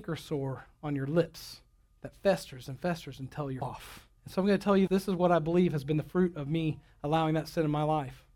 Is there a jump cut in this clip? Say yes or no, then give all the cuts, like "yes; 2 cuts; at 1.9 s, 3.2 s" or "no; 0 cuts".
yes; 4 cuts; at 1.8 s, 3.6 s, 4.2 s, 4.9 s